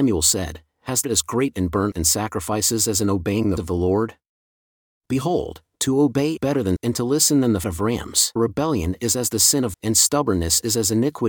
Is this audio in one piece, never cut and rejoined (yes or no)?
no